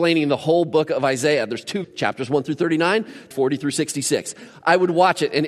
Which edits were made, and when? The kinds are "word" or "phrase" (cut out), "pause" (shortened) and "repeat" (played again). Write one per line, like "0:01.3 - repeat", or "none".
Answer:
0:01.8 - word
0:03.3 - word